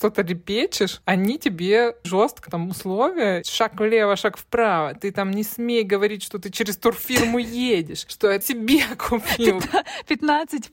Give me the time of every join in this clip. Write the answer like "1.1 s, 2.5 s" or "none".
2.0 s, 2.5 s, 3.4 s, 8.4 s